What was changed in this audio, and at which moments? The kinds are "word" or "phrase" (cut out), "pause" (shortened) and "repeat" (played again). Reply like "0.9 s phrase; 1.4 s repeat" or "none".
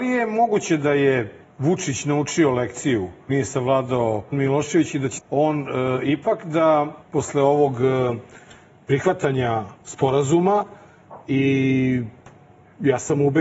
1.4 s pause; 3.3 s word; 4.3 s word; 5.2 s word; 7.0 s pause; 9.8 s pause